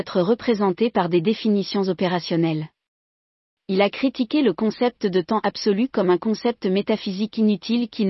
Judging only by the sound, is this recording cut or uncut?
uncut